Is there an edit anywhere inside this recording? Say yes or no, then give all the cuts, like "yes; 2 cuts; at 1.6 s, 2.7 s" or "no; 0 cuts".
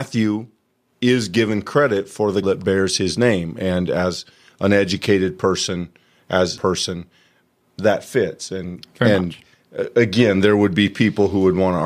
yes; 2 cuts; at 2.4 s, 6.6 s